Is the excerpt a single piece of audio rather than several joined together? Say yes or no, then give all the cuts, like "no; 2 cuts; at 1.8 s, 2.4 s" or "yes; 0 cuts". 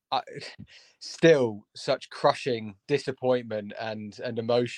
no; 1 cut; at 2.8 s